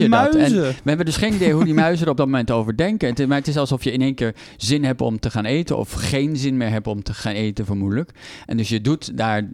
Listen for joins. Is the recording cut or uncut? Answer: uncut